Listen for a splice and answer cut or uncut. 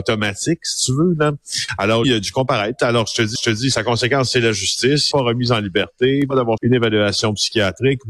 cut